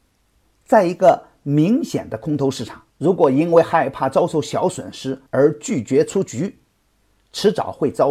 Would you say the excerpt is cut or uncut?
cut